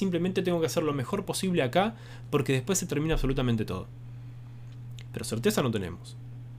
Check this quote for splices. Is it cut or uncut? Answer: uncut